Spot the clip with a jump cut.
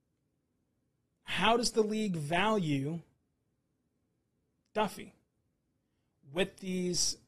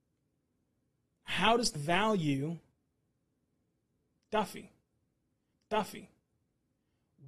second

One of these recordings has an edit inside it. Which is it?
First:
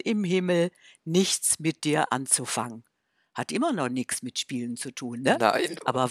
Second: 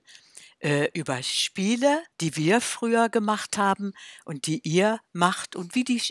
second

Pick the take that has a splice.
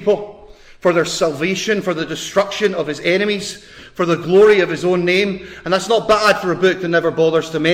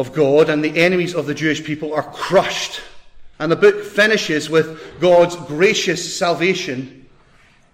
second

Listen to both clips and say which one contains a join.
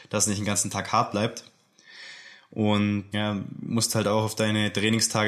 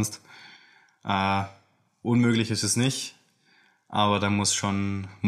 first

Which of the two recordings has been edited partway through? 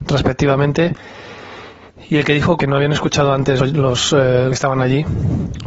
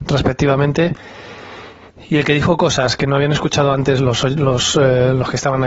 first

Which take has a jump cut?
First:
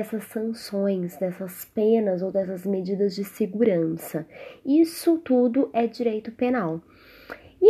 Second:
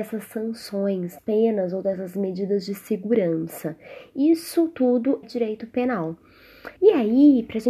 second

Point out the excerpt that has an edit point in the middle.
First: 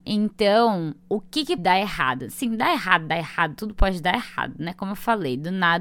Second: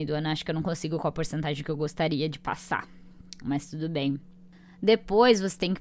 first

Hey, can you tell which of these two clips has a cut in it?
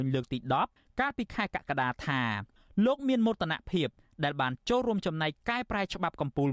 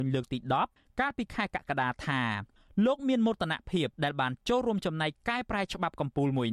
second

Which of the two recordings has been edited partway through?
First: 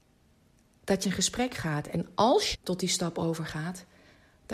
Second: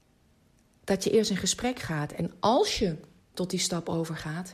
first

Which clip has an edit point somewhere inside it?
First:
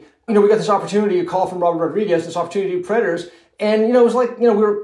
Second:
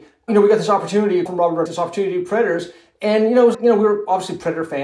second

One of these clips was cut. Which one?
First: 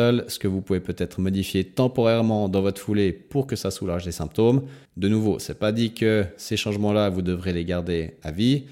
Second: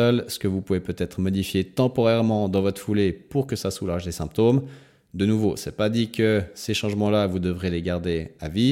first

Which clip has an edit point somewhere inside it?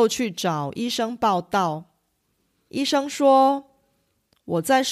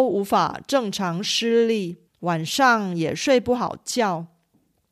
second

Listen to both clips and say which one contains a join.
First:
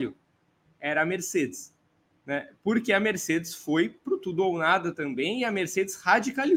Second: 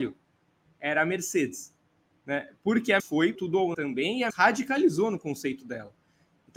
second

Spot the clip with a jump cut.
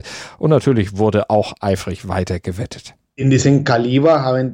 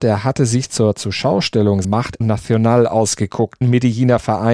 second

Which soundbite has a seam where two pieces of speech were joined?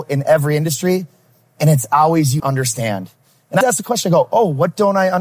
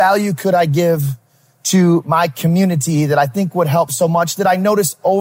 first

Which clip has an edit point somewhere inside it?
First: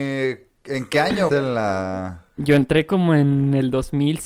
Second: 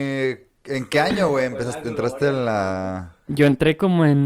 first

